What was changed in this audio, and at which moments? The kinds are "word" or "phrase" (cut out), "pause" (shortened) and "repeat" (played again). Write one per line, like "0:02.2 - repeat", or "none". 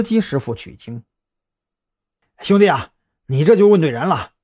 none